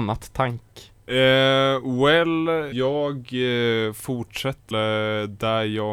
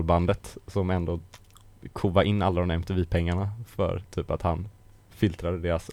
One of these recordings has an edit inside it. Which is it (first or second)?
first